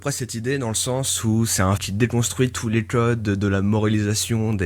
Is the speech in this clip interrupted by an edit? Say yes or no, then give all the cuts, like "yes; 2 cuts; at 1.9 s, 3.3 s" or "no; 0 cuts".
yes; 1 cut; at 1.8 s